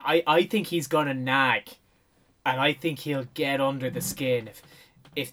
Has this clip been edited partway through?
no; 0 cuts

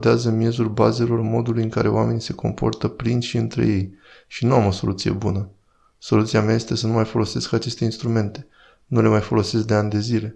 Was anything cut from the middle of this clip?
no; 0 cuts

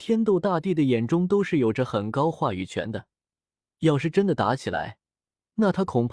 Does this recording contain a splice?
no; 0 cuts

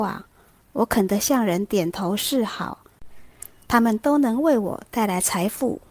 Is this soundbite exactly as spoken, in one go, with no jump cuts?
no; 1 cut; at 3.6 s

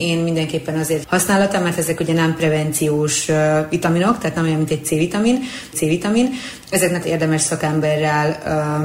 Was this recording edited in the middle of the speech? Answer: yes; 3 cuts; at 1.0 s, 5.7 s, 7.0 s

